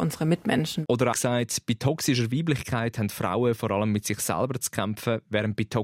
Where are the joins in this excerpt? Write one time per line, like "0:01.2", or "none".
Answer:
0:01.1